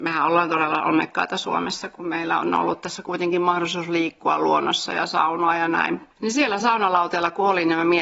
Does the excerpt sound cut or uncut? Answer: uncut